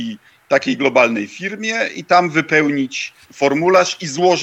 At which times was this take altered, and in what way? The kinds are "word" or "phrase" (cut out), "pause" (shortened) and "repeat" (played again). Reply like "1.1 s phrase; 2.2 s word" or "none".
3.2 s pause